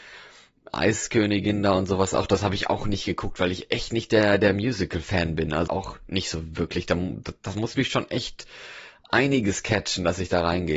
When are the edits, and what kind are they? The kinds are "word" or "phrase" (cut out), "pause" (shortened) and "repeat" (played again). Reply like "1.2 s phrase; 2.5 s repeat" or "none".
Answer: 5.7 s phrase